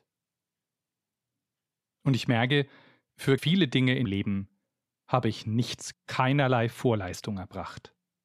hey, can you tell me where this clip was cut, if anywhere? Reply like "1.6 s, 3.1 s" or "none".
3.4 s, 4.0 s, 5.9 s